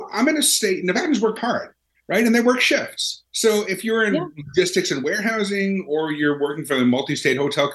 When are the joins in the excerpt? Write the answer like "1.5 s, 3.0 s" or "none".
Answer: 1.4 s, 3.3 s